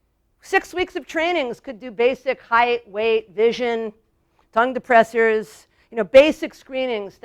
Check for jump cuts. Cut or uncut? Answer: uncut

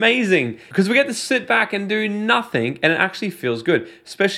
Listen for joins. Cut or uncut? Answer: uncut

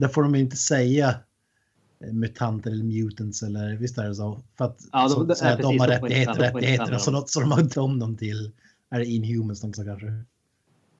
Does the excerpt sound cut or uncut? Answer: cut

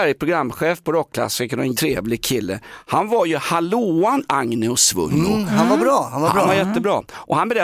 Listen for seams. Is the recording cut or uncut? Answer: cut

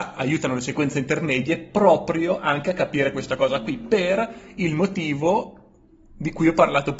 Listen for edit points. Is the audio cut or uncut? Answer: uncut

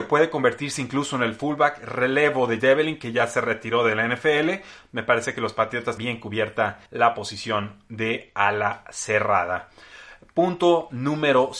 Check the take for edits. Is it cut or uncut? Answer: cut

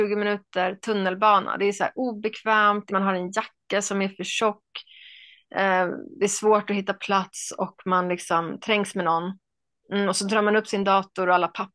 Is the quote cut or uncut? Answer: cut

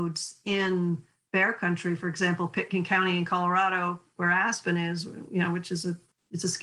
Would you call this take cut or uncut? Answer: uncut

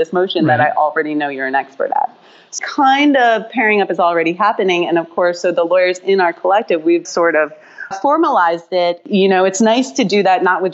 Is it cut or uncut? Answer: cut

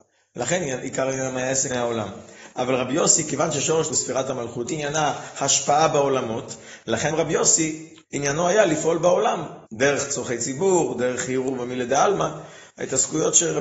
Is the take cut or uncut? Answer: cut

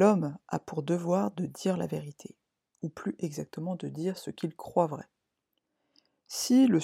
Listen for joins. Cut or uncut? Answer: uncut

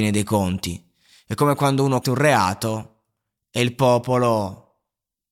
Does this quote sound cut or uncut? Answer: cut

